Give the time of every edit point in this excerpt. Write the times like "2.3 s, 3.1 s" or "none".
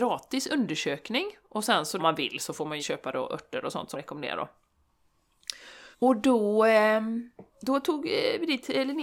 2.0 s, 2.8 s, 3.9 s, 5.9 s, 7.5 s